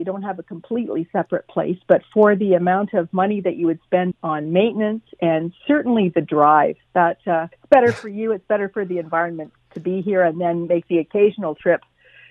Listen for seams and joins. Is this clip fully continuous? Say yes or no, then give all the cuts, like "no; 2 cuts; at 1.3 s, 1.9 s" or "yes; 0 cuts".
no; 4 cuts; at 4.1 s, 6.8 s, 7.5 s, 9.6 s